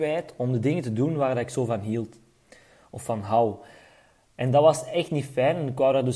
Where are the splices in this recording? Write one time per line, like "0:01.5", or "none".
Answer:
none